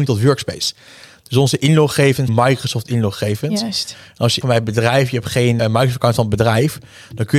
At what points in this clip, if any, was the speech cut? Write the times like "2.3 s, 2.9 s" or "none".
2.3 s, 4.4 s, 5.6 s